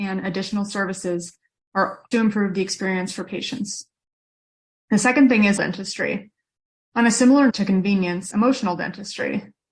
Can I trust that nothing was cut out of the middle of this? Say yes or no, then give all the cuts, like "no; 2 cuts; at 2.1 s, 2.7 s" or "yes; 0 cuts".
no; 4 cuts; at 2.1 s, 5.6 s, 7.5 s, 8.3 s